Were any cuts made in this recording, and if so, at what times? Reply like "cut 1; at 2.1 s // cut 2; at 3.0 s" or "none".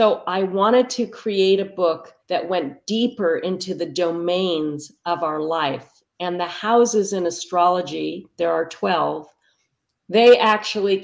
cut 1; at 2.2 s